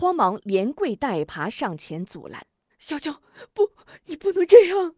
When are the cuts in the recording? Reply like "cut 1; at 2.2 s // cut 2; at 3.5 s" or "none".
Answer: cut 1; at 2.7 s // cut 2; at 4.0 s